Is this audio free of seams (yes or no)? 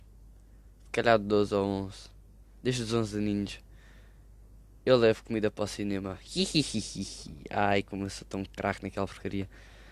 yes